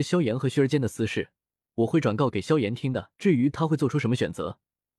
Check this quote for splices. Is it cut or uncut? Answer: cut